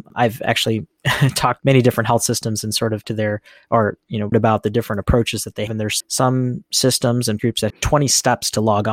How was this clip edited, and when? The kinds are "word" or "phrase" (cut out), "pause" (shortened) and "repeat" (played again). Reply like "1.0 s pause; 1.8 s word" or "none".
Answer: 1.6 s word; 3.0 s word; 4.3 s word; 5.7 s word; 6.0 s word; 7.4 s word; 7.7 s word

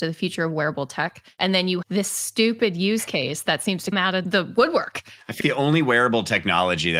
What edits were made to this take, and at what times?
1.8 s word; 3.9 s word; 5.4 s word

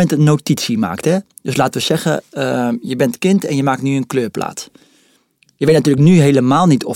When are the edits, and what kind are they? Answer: none

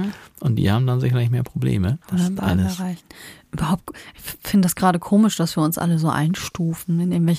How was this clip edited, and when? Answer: 2.0 s pause

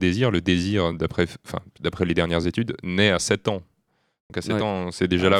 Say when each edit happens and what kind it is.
none

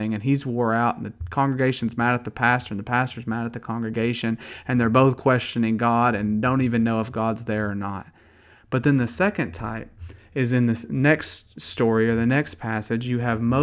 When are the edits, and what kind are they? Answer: none

